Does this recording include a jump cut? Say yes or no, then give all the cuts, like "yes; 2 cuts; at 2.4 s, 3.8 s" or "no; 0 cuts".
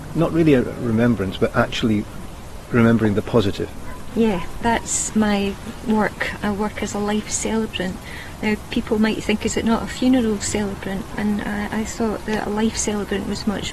no; 0 cuts